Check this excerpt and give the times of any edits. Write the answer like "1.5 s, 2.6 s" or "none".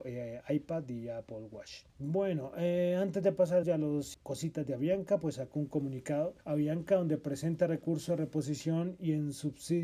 1.9 s, 3.6 s, 4.1 s, 6.4 s